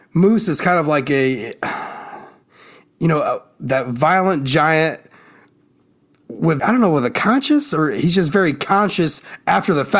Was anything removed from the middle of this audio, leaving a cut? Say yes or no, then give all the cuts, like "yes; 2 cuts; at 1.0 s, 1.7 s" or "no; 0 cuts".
yes; 1 cut; at 6.6 s